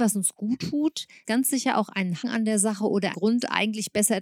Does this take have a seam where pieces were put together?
yes; 3 cuts; at 1.2 s, 2.2 s, 3.1 s

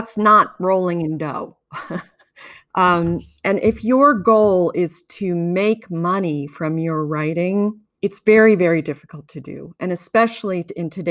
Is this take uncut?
yes; 0 cuts

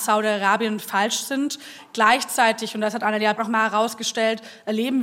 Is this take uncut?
no; 1 cut; at 3.4 s

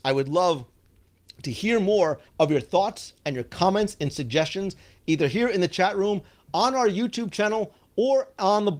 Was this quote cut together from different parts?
yes; 1 cut; at 2.3 s

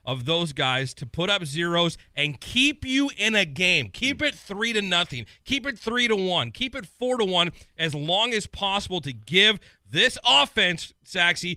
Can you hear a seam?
no; 0 cuts

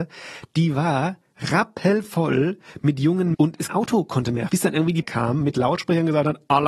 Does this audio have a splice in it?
yes; 4 cuts; at 3.3 s, 3.7 s, 4.5 s, 5.0 s

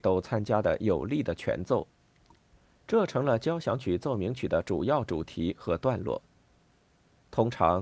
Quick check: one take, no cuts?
yes; 0 cuts

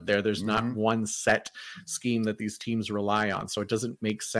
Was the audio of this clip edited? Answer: no; 0 cuts

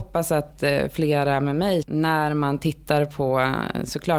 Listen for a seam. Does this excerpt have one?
yes; 1 cut; at 1.8 s

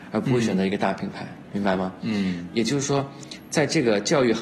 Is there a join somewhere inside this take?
yes; 1 cut; at 1.4 s

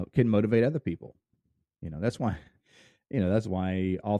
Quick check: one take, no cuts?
yes; 0 cuts

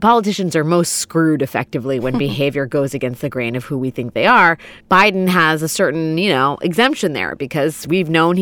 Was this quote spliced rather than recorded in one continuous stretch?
yes; 1 cut; at 4.8 s

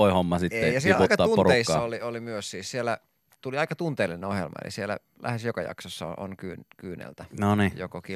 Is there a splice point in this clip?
no; 0 cuts

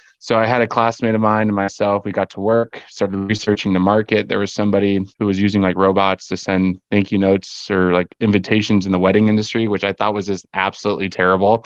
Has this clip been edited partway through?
yes; 1 cut; at 5.1 s

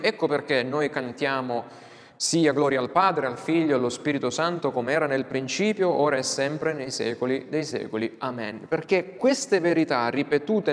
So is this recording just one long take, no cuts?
yes; 0 cuts

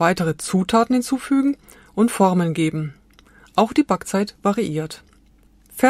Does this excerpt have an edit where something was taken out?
no; 0 cuts

